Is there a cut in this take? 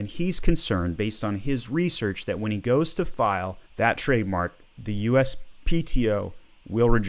yes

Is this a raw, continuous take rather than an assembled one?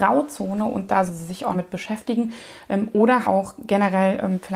no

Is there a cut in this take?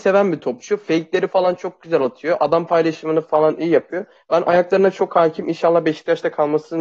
no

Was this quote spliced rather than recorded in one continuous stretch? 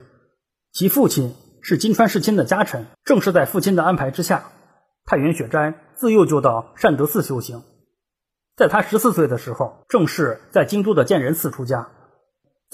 yes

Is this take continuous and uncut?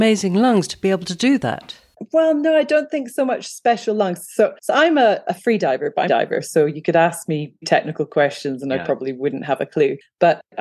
no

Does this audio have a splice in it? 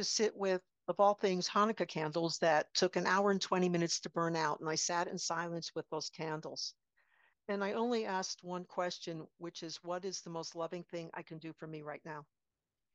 no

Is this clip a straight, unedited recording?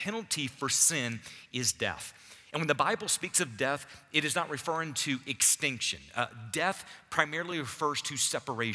yes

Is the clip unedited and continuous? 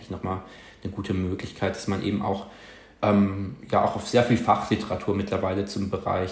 yes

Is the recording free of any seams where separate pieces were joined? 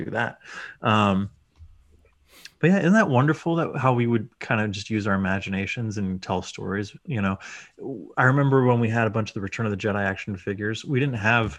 yes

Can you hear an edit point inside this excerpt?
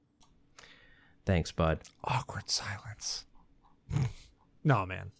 no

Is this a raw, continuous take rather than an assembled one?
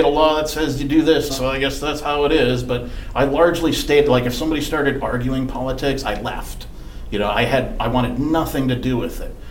no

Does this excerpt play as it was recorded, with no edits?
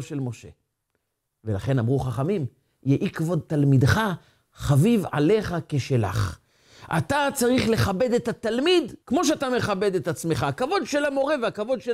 no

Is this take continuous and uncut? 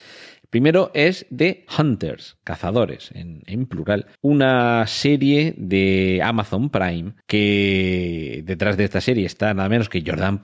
no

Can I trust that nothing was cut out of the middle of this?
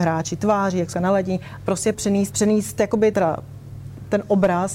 no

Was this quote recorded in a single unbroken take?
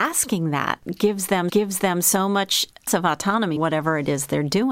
no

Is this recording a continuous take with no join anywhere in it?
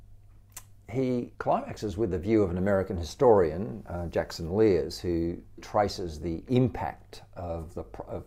no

